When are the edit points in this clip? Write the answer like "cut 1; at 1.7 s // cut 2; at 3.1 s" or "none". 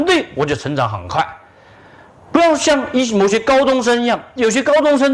none